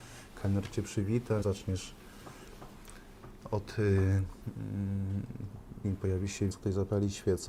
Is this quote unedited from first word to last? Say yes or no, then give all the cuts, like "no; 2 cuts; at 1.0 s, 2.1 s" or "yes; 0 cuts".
no; 3 cuts; at 1.4 s, 5.8 s, 6.5 s